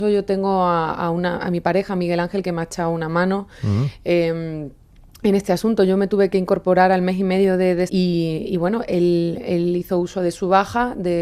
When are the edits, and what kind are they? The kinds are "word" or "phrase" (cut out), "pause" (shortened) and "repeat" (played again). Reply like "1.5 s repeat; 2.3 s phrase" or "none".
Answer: 7.9 s phrase

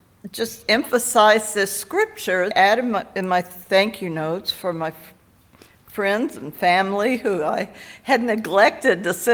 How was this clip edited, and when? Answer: 2.5 s phrase

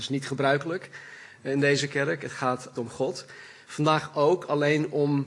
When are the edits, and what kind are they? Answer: 2.7 s word

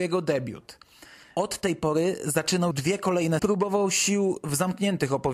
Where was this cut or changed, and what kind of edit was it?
1.2 s pause; 2.7 s word; 3.4 s phrase

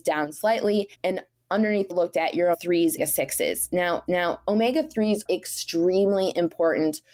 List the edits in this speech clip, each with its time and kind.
0.9 s pause; 1.9 s phrase; 2.5 s word; 3.0 s phrase; 4.1 s repeat; 5.3 s word

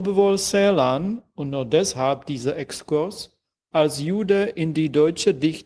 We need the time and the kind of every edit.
none

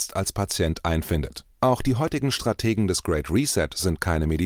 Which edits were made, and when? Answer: 1.5 s pause

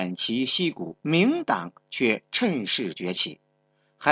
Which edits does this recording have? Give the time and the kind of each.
1.0 s pause

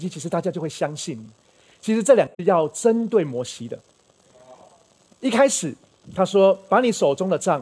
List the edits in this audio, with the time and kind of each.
2.3 s pause

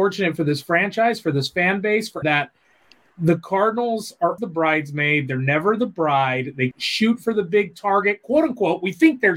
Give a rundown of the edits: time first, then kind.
2.2 s word; 4.4 s word; 6.7 s word

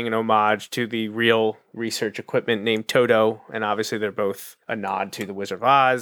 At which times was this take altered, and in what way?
4.6 s pause

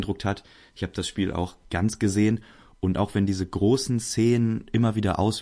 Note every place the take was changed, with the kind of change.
none

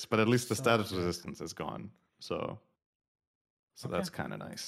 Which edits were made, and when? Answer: none

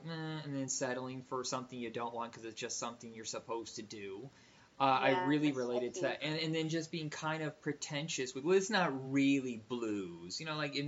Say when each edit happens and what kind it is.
none

